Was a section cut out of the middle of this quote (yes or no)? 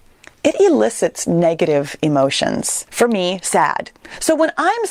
yes